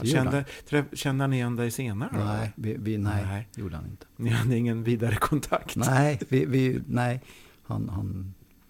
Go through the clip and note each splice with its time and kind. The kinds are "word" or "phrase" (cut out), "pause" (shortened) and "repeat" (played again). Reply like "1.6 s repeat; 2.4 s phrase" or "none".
none